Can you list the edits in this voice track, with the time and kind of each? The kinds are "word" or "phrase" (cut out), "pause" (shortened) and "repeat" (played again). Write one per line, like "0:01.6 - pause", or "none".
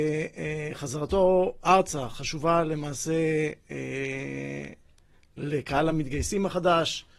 none